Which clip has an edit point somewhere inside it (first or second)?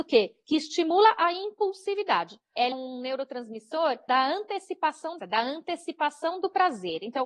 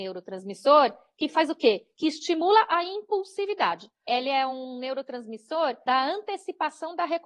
first